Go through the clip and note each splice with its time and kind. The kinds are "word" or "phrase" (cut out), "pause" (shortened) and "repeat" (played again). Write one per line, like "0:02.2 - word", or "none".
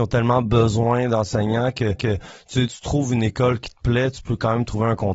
0:02.0 - repeat
0:02.7 - phrase